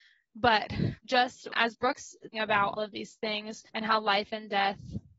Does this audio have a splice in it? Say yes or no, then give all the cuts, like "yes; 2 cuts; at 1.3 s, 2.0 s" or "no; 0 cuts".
yes; 5 cuts; at 1.0 s, 1.5 s, 2.3 s, 2.8 s, 3.7 s